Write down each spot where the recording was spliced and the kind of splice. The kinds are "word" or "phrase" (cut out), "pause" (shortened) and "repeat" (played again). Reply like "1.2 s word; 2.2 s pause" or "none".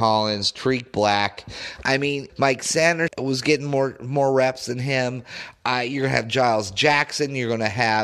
2.3 s word; 3.1 s word